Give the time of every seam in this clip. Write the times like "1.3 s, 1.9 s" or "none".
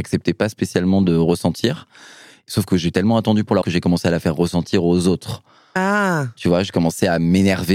3.6 s

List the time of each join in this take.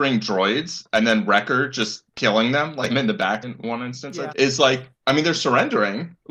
2.1 s, 2.9 s, 3.4 s, 4.3 s, 5.0 s

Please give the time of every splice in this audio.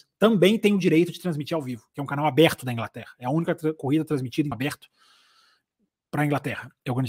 4.5 s

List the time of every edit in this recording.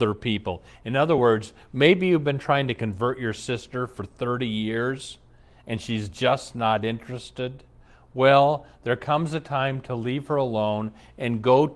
none

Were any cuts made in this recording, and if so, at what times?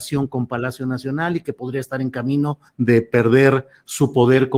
2.7 s

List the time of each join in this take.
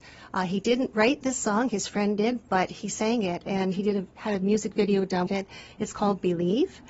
4.2 s, 5.3 s

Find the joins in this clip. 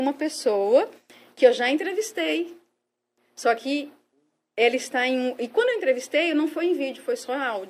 none

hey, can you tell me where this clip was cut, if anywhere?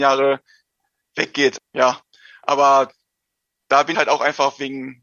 3.9 s

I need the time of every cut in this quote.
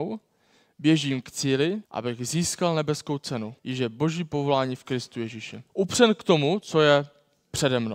1.8 s, 3.6 s, 5.7 s

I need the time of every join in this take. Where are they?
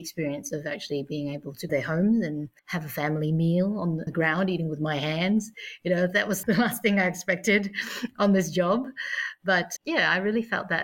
1.7 s, 2.6 s, 4.1 s, 6.4 s, 9.8 s

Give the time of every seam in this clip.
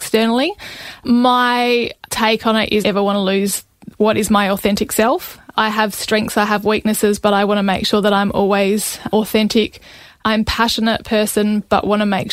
2.8 s

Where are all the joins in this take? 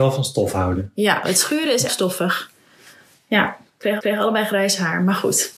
1.2 s, 1.9 s, 4.0 s

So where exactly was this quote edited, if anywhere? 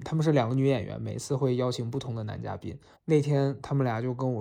2.9 s

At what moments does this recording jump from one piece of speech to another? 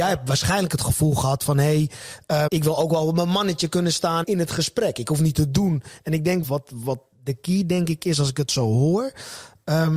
2.5 s, 4.2 s, 6.4 s

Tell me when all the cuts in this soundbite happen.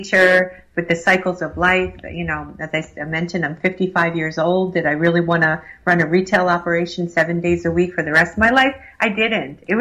none

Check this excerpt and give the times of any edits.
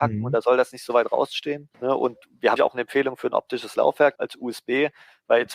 1.7 s, 2.6 s, 4.1 s

